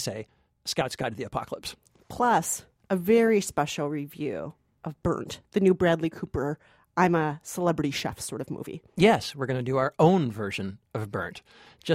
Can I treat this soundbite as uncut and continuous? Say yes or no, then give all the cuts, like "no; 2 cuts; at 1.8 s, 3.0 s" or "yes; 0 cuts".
yes; 0 cuts